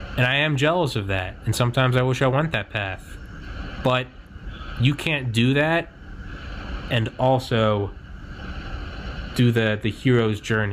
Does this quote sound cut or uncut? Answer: uncut